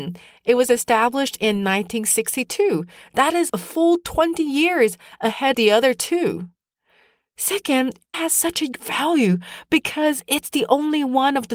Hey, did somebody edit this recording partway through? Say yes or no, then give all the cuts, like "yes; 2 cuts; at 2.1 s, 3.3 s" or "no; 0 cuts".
yes; 4 cuts; at 3.5 s, 5.5 s, 8.1 s, 8.7 s